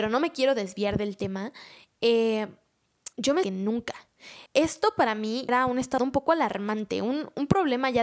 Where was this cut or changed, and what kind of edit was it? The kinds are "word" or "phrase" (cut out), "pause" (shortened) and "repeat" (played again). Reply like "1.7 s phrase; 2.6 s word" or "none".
3.1 s pause; 3.4 s phrase; 4.5 s pause; 5.5 s word; 6.0 s phrase

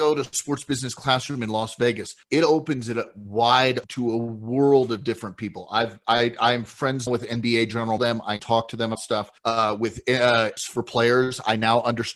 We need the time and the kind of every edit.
2.2 s pause; 3.8 s word; 7.1 s word; 8.0 s phrase; 8.4 s word; 9.0 s word; 9.4 s pause; 10.6 s word

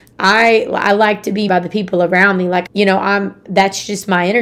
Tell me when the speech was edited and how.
1.5 s word; 2.7 s word

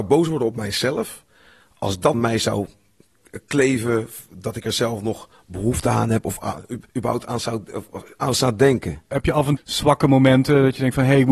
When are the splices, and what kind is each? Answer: 2.1 s phrase; 6.9 s pause; 9.6 s word

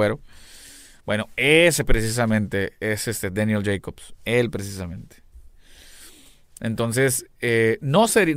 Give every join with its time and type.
none

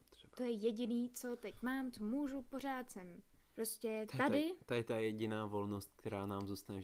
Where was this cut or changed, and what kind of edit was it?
3.4 s pause

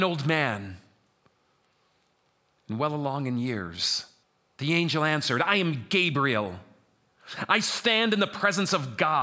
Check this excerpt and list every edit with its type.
4.2 s pause

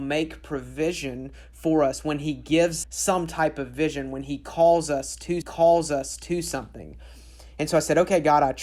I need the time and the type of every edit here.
2.8 s word; 5.4 s repeat

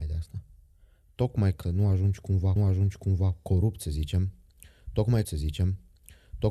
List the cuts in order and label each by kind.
1.6 s word; 2.6 s repeat; 5.2 s repeat

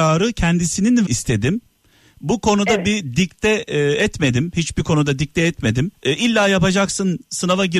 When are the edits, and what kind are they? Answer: 1.1 s word; 5.9 s pause

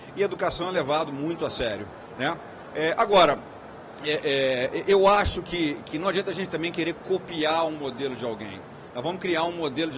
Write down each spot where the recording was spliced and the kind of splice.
none

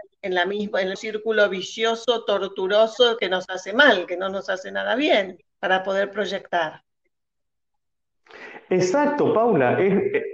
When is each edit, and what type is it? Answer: 1.0 s word; 5.5 s pause

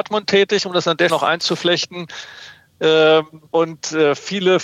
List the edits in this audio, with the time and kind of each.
1.1 s word; 3.5 s pause

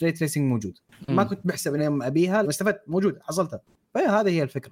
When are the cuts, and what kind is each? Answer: 1.8 s word; 2.4 s phrase

